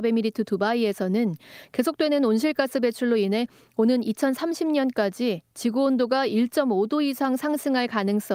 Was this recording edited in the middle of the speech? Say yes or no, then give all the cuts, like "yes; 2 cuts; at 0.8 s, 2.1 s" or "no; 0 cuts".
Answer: no; 0 cuts